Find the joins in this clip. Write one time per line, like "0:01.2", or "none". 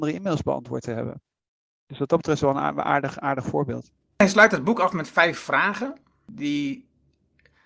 none